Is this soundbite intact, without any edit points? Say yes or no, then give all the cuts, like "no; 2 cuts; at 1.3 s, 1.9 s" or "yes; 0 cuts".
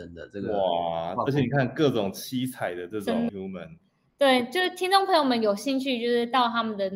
no; 1 cut; at 3.3 s